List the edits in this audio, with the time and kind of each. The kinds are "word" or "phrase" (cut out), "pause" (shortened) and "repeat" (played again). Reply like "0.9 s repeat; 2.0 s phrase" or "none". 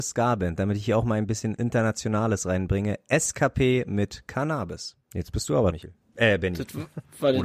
5.0 s pause; 5.7 s word